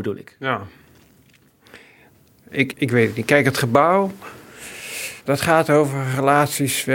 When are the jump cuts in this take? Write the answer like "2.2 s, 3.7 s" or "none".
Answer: 2.7 s, 5.2 s